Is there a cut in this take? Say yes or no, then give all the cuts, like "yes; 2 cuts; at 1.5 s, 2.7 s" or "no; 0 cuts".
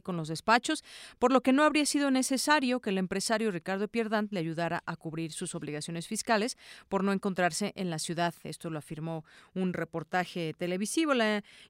no; 0 cuts